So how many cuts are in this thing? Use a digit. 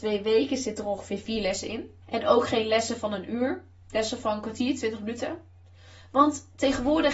1